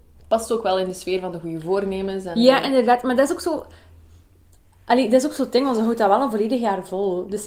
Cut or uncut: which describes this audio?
uncut